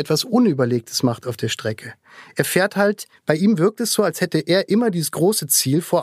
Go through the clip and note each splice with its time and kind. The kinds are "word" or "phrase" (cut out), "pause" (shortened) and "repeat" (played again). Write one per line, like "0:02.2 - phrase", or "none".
0:03.1 - pause